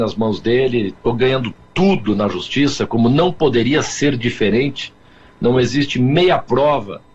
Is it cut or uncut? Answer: uncut